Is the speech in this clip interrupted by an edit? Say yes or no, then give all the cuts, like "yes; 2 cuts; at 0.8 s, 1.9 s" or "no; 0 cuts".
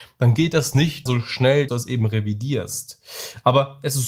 yes; 2 cuts; at 1.1 s, 1.7 s